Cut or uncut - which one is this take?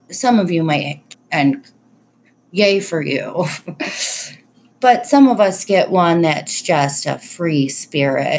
cut